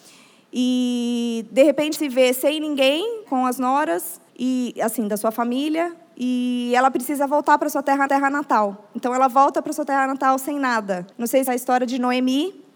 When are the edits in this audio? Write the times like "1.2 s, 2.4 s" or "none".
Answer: 1.9 s, 3.3 s, 4.3 s, 8.1 s, 11.1 s, 11.5 s